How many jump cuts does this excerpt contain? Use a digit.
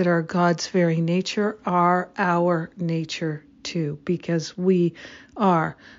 0